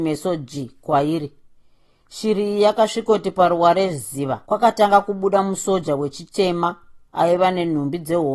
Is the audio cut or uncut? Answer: cut